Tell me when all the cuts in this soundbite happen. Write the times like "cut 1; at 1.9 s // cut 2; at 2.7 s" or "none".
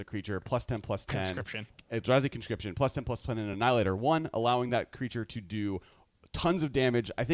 none